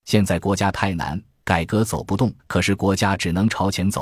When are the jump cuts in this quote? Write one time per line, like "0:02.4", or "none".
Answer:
0:02.4